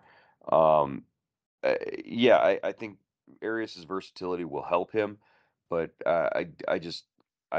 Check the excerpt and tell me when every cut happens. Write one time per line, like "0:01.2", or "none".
none